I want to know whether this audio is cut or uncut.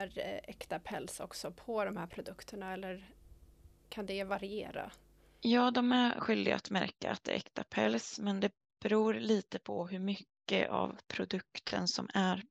uncut